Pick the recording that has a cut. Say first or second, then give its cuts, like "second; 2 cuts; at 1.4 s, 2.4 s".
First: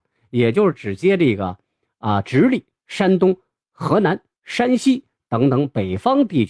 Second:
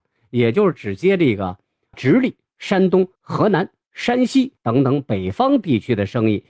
second; 3 cuts; at 1.9 s, 3.2 s, 4.6 s